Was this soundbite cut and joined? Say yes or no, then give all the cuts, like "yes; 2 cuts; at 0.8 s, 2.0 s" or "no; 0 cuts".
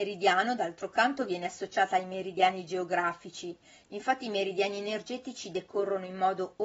no; 0 cuts